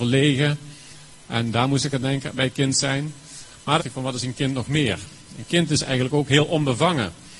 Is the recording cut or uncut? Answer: cut